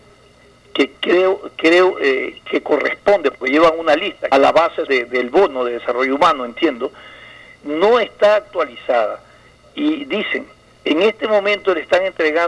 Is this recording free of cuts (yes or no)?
no